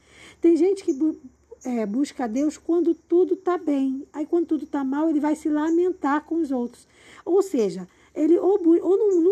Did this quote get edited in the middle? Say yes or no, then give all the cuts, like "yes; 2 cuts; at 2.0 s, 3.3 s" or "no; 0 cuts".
no; 0 cuts